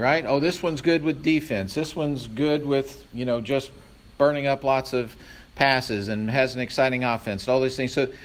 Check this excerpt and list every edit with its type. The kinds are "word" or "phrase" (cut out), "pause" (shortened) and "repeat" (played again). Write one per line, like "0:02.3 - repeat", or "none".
none